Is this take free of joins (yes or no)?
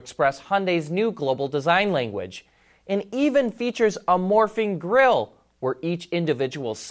yes